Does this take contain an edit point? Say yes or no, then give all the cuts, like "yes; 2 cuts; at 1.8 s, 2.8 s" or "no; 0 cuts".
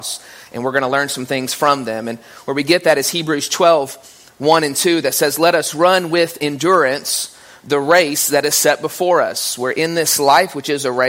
no; 0 cuts